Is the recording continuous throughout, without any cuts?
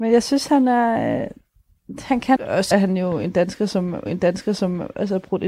no; 3 cuts; at 2.4 s, 2.7 s, 4.1 s

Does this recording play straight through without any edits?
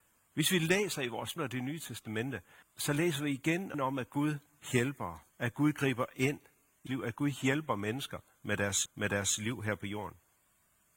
no; 6 cuts; at 1.4 s, 2.6 s, 3.7 s, 5.3 s, 6.9 s, 8.9 s

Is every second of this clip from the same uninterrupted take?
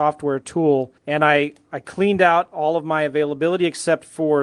no; 1 cut; at 1.0 s

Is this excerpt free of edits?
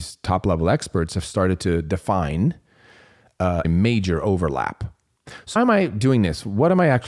no; 2 cuts; at 3.6 s, 5.6 s

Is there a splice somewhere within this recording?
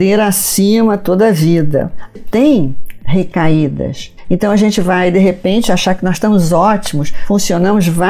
yes; 1 cut; at 2.1 s

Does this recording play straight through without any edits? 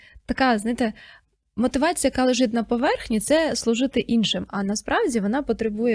yes; 0 cuts

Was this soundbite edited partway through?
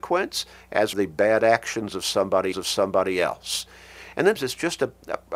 yes; 3 cuts; at 0.9 s, 2.5 s, 4.4 s

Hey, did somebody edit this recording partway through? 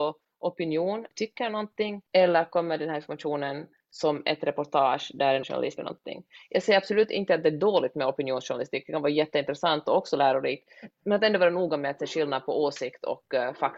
yes; 4 cuts; at 1.1 s, 2.1 s, 5.4 s, 5.8 s

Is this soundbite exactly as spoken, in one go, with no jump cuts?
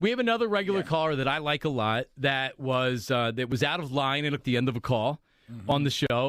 no; 1 cut; at 4.4 s

